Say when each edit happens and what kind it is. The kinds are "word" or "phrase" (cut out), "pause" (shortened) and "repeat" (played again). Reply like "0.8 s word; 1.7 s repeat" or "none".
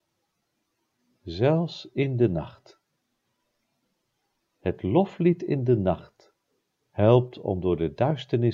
none